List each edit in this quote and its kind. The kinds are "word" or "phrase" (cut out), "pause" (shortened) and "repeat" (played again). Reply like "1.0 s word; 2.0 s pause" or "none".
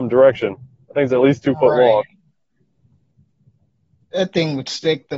none